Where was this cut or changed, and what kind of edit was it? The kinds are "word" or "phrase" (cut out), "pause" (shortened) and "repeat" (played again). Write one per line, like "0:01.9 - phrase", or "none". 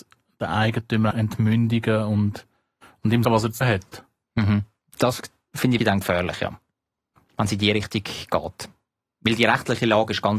0:01.1 - word
0:03.2 - word
0:03.6 - word
0:05.8 - word